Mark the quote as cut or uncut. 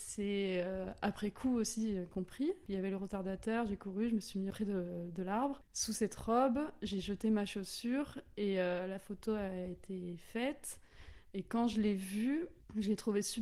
cut